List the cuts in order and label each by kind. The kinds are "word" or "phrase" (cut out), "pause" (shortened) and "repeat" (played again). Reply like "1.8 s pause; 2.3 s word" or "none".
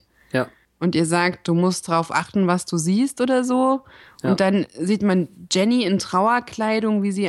none